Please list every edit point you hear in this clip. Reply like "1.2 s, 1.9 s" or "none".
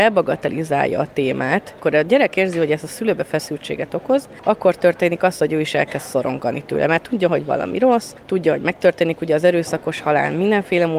none